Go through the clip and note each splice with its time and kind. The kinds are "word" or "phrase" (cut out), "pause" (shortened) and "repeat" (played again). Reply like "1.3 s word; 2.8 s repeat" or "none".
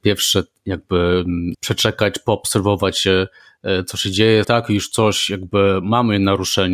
1.5 s word; 4.4 s phrase